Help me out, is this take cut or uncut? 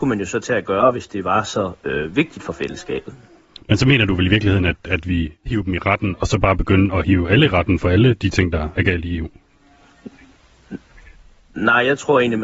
cut